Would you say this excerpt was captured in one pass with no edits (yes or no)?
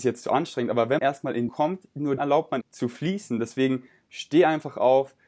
no